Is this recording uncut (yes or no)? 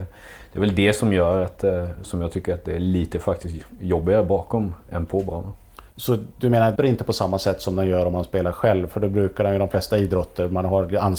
no